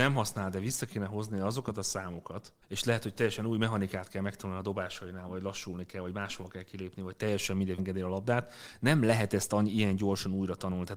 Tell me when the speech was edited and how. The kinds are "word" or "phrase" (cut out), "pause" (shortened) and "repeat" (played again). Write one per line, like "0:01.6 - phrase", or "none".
0:02.6 - pause
0:07.8 - phrase